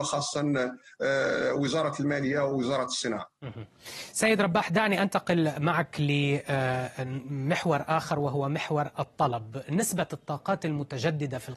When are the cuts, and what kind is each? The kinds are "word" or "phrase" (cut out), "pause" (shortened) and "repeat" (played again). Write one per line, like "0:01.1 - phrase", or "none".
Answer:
none